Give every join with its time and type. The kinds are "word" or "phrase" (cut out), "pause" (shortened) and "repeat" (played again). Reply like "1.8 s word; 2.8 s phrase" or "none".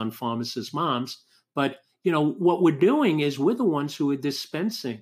none